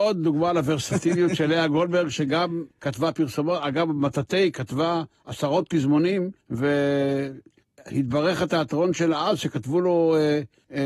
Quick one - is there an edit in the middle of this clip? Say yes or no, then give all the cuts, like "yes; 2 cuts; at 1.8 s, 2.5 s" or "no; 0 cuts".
yes; 2 cuts; at 2.7 s, 6.4 s